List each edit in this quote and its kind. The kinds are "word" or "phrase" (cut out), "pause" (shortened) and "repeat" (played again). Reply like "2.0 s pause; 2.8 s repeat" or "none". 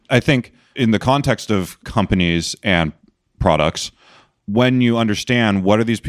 none

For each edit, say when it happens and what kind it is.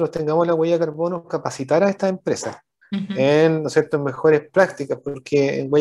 2.8 s pause

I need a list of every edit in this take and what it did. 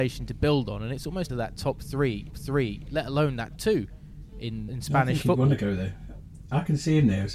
1.3 s phrase; 2.3 s repeat; 3.6 s word; 4.7 s word

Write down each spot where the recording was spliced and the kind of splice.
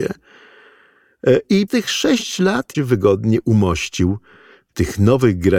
1.7 s word; 2.7 s phrase

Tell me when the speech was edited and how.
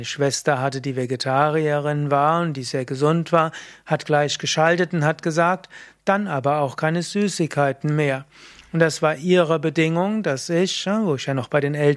none

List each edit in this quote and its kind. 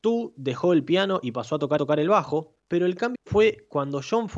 1.8 s repeat; 2.6 s pause; 3.1 s word

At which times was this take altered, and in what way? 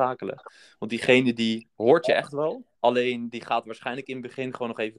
2.8 s pause

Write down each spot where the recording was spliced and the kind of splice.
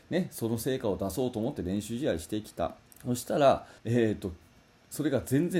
2.9 s pause; 3.8 s pause

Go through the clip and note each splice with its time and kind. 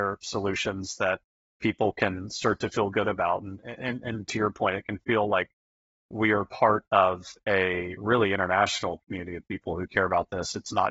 none

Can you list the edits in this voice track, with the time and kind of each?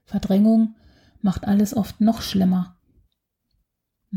none

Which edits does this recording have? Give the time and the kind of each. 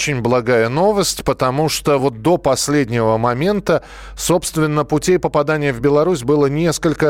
none

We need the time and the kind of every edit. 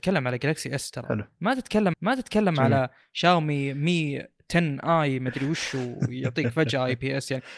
1.9 s repeat

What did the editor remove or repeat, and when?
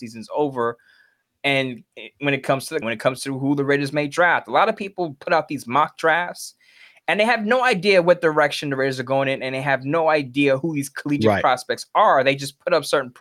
2.8 s word

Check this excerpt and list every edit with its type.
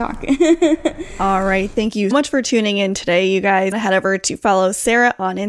2.1 s word; 3.7 s phrase

